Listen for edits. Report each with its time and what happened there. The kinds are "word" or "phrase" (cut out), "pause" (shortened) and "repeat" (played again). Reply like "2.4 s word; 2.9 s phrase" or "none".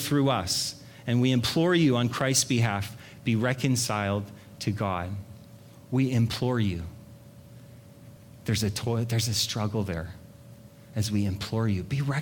none